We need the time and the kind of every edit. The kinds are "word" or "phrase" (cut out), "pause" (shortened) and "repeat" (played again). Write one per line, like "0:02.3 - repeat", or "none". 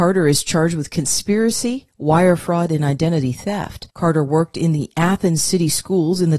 0:03.9 - pause